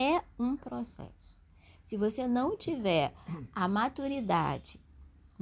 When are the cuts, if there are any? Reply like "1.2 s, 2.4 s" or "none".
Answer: none